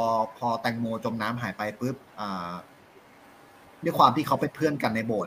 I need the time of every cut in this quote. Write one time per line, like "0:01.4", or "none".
0:02.1